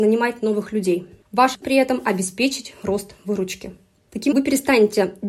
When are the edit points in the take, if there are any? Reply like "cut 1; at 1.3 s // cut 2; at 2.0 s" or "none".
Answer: cut 1; at 1.6 s // cut 2; at 4.3 s